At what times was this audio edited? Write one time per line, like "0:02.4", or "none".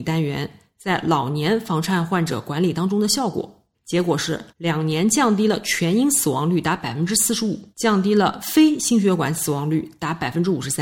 0:03.7
0:04.5
0:07.7